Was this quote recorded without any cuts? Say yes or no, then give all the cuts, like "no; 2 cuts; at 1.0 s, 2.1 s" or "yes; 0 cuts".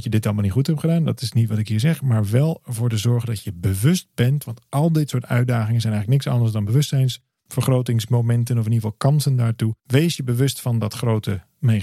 no; 1 cut; at 9.8 s